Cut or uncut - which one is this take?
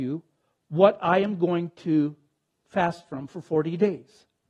uncut